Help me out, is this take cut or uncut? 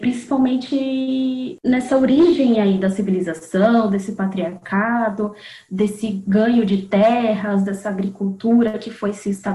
uncut